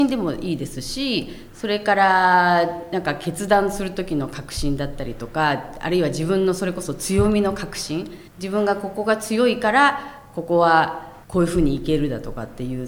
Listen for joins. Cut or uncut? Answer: cut